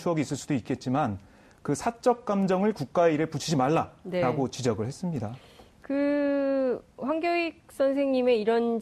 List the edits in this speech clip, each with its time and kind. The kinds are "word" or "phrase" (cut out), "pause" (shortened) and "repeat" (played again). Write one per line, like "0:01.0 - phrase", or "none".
none